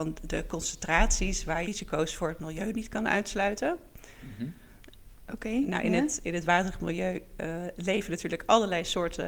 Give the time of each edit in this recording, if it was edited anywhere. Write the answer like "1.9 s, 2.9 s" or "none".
1.6 s